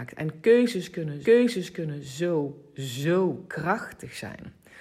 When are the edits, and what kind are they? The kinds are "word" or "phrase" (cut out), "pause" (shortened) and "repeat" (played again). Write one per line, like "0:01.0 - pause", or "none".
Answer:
0:01.2 - repeat
0:03.5 - word